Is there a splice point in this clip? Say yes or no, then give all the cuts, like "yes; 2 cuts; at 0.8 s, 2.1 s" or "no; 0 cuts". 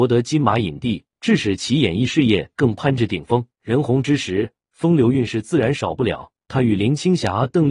yes; 3 cuts; at 1.1 s, 3.5 s, 6.4 s